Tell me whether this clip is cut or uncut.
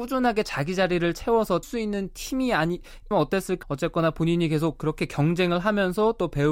cut